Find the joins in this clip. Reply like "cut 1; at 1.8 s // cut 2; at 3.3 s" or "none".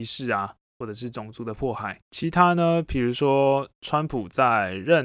cut 1; at 2.1 s